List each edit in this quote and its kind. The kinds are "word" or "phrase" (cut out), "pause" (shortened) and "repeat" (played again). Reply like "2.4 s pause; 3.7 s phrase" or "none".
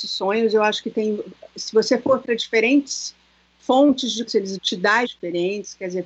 4.3 s word; 4.6 s word; 5.0 s word